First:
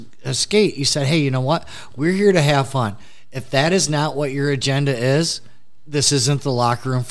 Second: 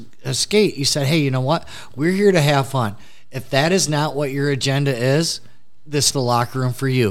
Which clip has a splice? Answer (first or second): second